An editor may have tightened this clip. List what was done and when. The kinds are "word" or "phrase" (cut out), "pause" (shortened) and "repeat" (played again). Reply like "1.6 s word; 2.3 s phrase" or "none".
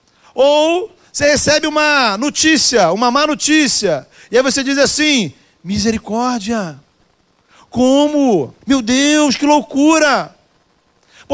8.6 s pause